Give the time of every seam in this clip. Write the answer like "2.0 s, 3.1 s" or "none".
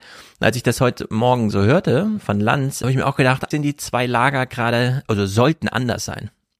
2.8 s, 3.5 s